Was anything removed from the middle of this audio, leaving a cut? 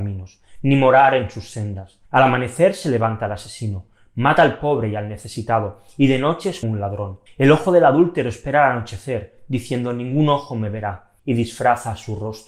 yes; 4 cuts; at 2.1 s, 6.6 s, 7.3 s, 11.2 s

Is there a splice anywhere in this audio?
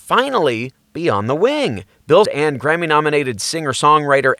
yes; 1 cut; at 2.3 s

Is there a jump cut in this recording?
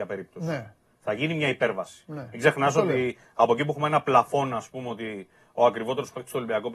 no; 0 cuts

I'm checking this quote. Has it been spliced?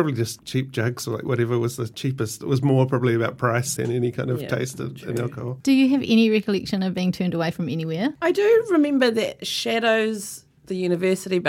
yes; 1 cut; at 3.8 s

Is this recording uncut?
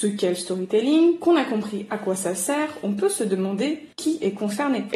no; 1 cut; at 3.9 s

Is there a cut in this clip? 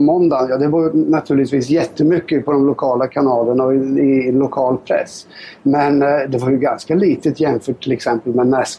no; 0 cuts

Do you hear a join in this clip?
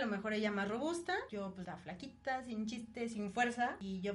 no; 0 cuts

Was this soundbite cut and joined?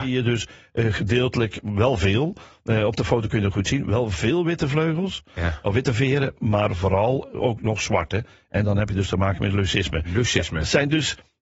no; 0 cuts

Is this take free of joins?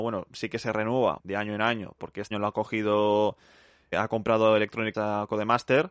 no; 5 cuts; at 1.2 s, 2.0 s, 2.3 s, 3.9 s, 4.9 s

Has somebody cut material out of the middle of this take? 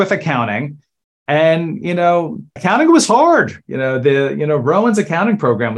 no; 0 cuts

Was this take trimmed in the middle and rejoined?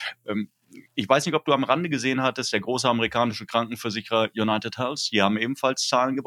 no; 0 cuts

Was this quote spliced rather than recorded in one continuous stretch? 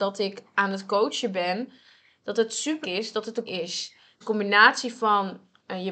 yes; 3 cuts; at 2.8 s, 3.5 s, 4.2 s

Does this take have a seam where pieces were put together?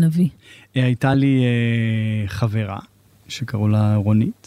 no; 0 cuts

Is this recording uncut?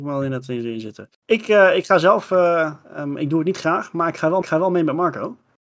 no; 2 cuts; at 1.1 s, 4.4 s

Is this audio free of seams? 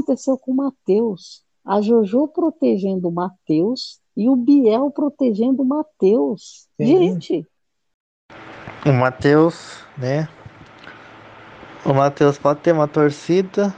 no; 3 cuts; at 1.5 s, 4.1 s, 6.7 s

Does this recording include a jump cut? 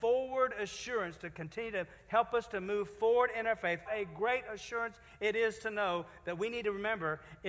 yes; 1 cut; at 3.9 s

